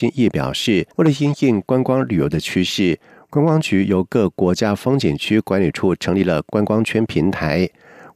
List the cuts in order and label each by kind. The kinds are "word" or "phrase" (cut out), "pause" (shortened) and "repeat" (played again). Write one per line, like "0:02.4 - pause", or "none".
0:00.9 - pause